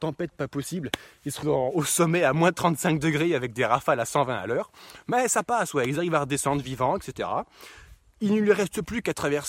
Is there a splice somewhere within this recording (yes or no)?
yes